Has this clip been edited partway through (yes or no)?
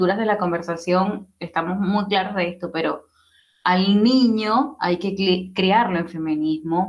no